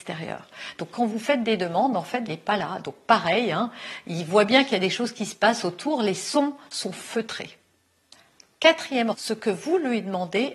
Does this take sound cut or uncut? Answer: cut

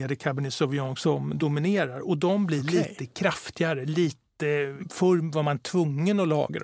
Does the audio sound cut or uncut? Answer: uncut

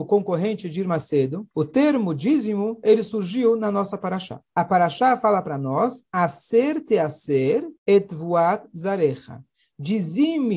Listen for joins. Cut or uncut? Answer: cut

